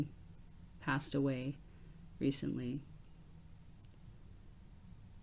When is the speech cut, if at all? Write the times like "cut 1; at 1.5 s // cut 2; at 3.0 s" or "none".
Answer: none